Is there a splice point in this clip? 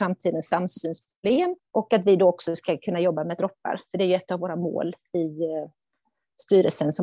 yes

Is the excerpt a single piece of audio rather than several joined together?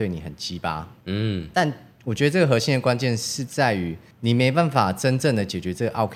no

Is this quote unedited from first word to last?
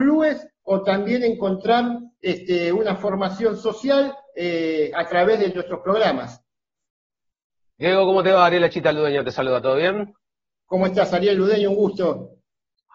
yes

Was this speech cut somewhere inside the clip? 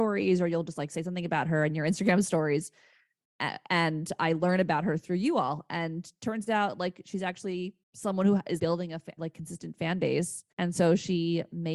yes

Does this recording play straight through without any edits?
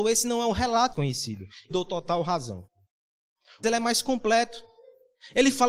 no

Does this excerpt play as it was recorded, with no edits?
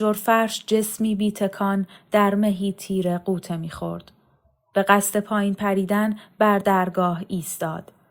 yes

